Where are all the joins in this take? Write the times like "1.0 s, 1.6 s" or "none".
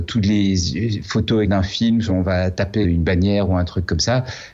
1.4 s, 2.1 s, 2.8 s